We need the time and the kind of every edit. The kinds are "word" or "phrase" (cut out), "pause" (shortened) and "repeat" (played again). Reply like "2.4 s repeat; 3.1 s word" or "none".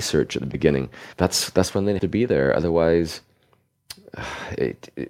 1.1 s pause; 2.0 s word